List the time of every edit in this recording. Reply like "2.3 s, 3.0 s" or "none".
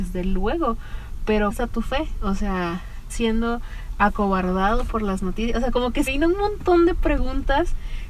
1.5 s, 3.1 s, 6.1 s